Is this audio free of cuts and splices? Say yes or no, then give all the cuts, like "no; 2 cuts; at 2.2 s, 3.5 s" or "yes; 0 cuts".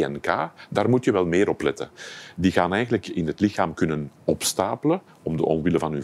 yes; 0 cuts